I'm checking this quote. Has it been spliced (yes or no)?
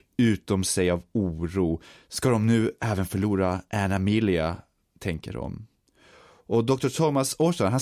no